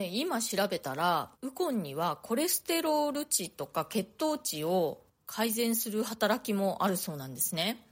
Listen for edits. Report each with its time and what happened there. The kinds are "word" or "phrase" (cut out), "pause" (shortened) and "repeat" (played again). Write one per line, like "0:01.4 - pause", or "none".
0:01.3 - pause